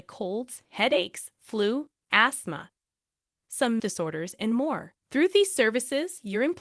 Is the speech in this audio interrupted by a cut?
yes; 2 cuts; at 3.8 s, 5.0 s

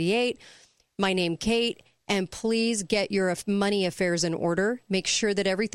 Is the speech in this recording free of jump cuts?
yes; 0 cuts

